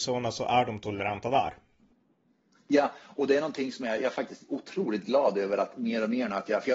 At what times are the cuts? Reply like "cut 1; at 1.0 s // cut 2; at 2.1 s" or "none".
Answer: none